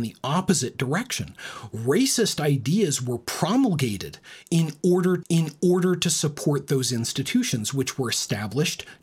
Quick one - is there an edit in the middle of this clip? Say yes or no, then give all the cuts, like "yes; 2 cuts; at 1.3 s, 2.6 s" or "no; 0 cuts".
yes; 1 cut; at 5.2 s